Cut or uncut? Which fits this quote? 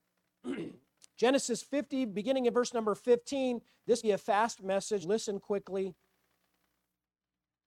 cut